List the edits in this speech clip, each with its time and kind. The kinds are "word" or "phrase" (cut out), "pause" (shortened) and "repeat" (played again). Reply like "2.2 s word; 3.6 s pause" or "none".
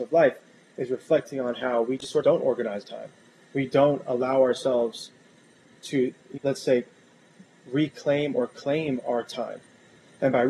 2.2 s word; 2.8 s word; 6.4 s word